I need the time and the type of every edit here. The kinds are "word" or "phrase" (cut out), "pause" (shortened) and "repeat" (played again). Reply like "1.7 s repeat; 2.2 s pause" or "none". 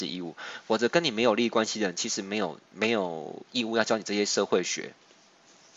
2.6 s pause